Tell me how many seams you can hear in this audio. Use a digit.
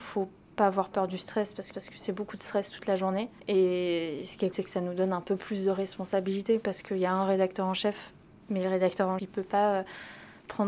5